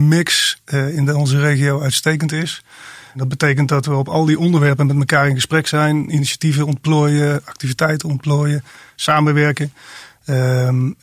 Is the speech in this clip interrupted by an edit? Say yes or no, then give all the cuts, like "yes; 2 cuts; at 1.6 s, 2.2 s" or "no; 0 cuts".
no; 0 cuts